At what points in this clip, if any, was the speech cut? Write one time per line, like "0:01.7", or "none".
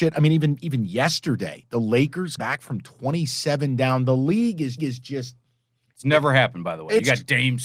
0:02.4
0:04.8

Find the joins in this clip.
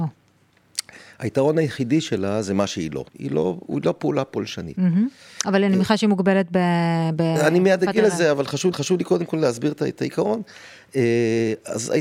0:03.1
0:08.7

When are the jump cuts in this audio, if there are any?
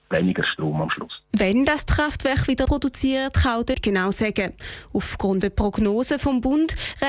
0:02.7
0:03.7
0:05.4

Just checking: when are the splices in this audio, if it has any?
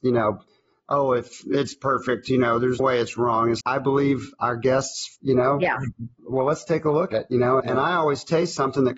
0:02.8
0:03.6
0:05.2
0:07.1
0:07.6

